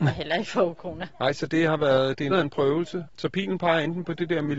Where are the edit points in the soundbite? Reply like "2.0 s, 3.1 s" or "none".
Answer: 2.3 s